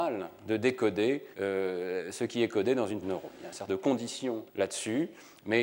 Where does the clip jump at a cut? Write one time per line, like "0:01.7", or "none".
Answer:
0:01.3
0:03.0
0:03.7
0:04.5